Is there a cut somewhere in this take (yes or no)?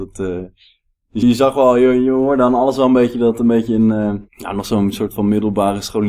yes